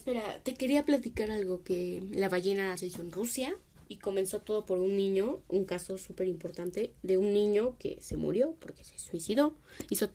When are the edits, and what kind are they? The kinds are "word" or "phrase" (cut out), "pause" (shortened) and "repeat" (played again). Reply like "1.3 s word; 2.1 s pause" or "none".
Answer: 2.8 s word; 3.7 s pause